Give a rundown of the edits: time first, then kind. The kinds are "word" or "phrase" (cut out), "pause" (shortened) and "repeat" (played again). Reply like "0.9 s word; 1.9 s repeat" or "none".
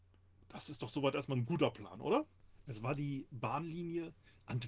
none